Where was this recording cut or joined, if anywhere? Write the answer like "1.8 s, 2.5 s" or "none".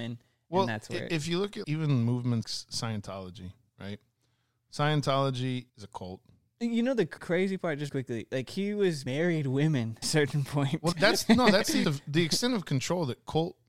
1.6 s, 2.4 s, 5.7 s, 7.2 s, 7.9 s, 9.1 s, 10.0 s, 10.9 s, 11.8 s

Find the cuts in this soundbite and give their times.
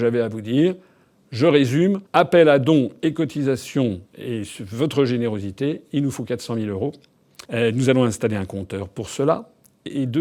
2.1 s, 4.1 s, 7.4 s

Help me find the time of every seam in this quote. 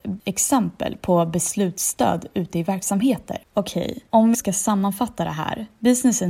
4.3 s

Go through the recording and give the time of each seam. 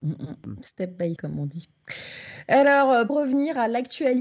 1.2 s, 3.1 s

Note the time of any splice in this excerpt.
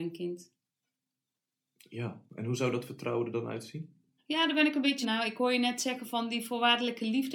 2.3 s, 4.2 s, 5.0 s

